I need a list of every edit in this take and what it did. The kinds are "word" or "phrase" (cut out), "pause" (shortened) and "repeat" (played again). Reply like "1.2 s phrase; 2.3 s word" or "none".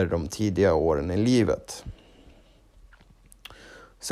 none